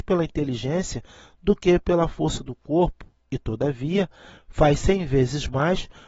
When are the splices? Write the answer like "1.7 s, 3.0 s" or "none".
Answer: none